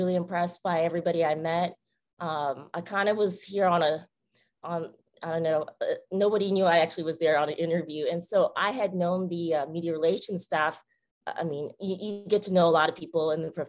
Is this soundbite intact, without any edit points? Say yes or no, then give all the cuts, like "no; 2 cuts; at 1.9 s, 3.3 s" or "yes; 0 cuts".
yes; 0 cuts